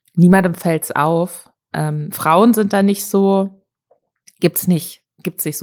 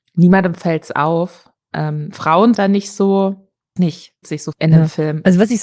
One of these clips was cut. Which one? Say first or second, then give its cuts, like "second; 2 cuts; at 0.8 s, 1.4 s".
second; 4 cuts; at 2.5 s, 3.8 s, 4.2 s, 4.5 s